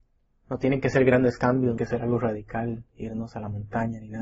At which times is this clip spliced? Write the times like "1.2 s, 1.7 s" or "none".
1.8 s, 2.9 s

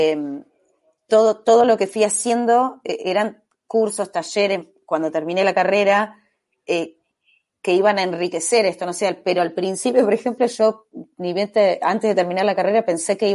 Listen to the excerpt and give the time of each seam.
none

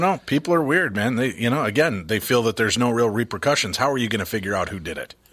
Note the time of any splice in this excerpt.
none

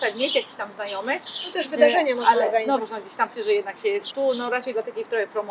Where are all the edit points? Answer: 2.8 s, 3.3 s, 4.1 s

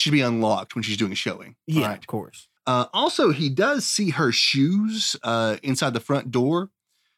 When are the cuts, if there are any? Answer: 2.6 s

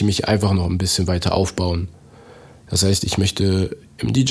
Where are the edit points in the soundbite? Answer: none

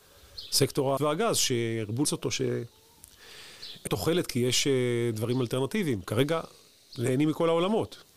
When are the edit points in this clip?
1.0 s, 2.0 s, 3.9 s

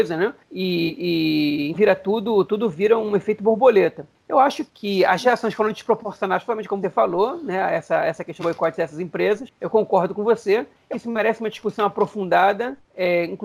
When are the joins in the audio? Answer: 1.7 s, 4.7 s, 6.8 s, 8.4 s, 10.9 s

